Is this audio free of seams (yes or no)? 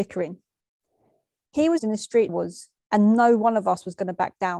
no